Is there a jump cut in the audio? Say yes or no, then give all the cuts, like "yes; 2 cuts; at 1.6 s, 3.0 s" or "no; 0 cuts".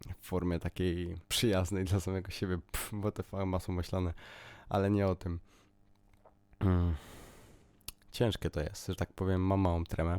yes; 1 cut; at 1.2 s